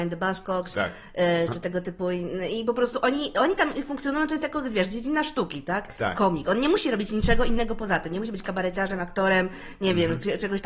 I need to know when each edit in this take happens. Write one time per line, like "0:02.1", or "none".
none